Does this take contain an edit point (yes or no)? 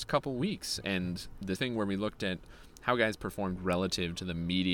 yes